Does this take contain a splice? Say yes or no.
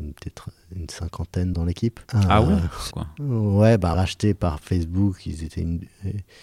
yes